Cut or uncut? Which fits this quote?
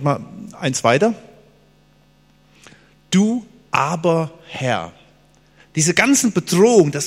uncut